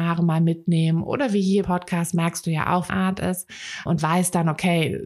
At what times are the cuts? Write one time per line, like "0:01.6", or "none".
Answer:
0:01.6
0:02.9
0:03.9